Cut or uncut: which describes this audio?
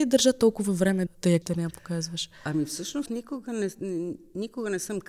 cut